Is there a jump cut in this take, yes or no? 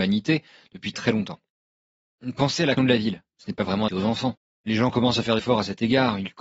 yes